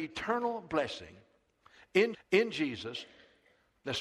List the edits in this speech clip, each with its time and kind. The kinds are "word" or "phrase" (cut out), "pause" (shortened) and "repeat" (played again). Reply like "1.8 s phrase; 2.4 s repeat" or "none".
2.1 s repeat